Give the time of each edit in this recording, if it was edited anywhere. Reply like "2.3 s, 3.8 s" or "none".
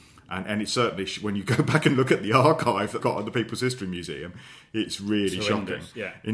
3.0 s